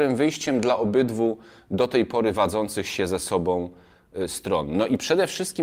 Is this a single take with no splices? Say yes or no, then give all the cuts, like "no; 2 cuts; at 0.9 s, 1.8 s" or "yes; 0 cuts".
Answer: yes; 0 cuts